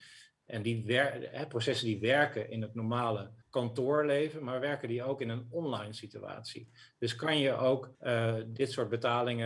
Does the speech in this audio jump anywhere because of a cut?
yes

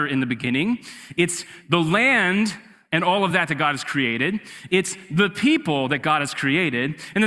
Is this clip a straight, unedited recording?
yes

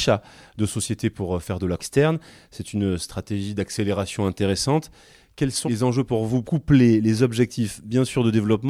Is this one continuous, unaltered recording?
no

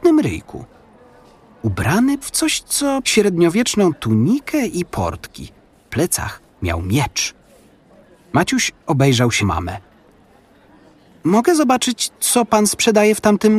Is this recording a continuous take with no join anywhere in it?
no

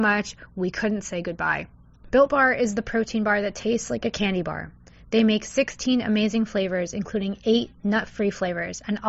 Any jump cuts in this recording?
no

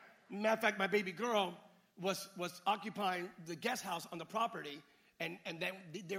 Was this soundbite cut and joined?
no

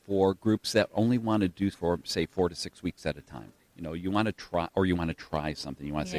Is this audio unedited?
no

